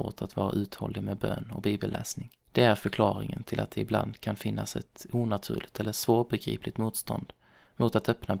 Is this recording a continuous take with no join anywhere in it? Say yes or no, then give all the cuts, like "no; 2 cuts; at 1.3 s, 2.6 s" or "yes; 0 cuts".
no; 1 cut; at 2.4 s